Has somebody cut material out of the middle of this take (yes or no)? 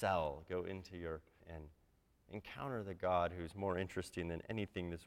yes